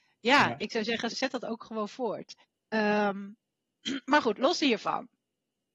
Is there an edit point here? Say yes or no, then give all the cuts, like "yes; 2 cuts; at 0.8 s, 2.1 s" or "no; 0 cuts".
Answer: yes; 2 cuts; at 1.1 s, 2.4 s